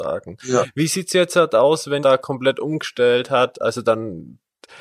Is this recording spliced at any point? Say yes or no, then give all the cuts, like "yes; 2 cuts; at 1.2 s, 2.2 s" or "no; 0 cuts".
yes; 1 cut; at 2.0 s